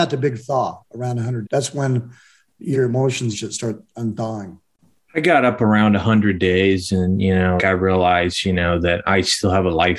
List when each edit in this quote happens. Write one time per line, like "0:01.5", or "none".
0:01.4
0:02.7
0:03.3
0:07.6